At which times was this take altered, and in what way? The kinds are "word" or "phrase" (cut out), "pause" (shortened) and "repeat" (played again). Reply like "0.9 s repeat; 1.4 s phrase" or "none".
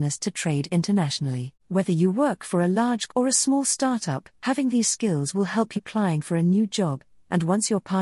1.6 s pause; 3.1 s word; 4.3 s pause; 5.8 s phrase